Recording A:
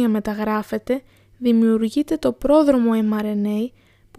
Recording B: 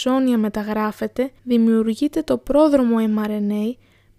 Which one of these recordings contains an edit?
B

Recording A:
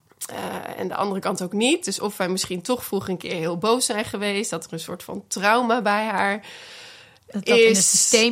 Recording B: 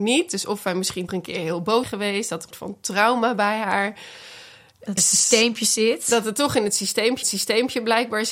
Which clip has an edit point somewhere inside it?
B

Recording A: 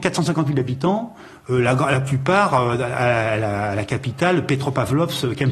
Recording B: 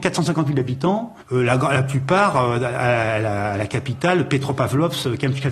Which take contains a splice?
B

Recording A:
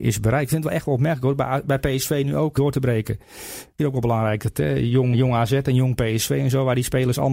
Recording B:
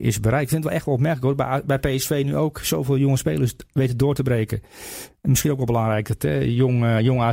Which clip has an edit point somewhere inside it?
A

